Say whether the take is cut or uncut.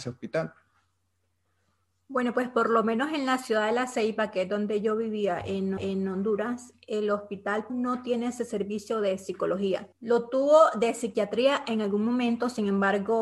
cut